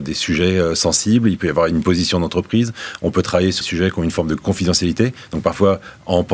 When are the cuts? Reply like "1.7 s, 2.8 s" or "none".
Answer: 3.6 s